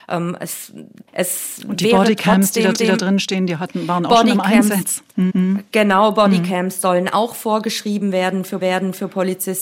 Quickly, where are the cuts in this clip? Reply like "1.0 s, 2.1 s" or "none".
1.1 s, 2.8 s, 5.3 s, 8.6 s